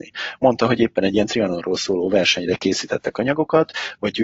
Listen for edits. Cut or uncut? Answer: uncut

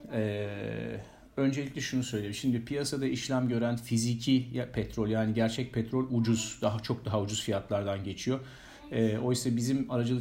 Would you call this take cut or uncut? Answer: uncut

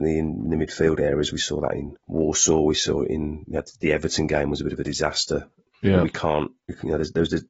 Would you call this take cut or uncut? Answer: uncut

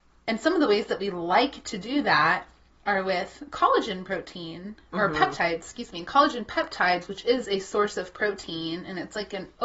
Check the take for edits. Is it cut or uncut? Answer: uncut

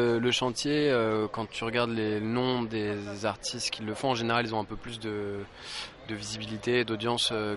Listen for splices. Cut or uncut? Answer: uncut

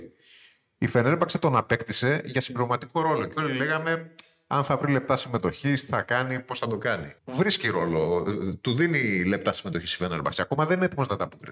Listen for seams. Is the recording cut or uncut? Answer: cut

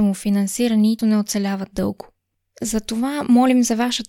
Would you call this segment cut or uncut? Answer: cut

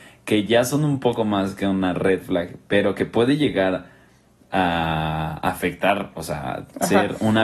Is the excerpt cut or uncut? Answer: uncut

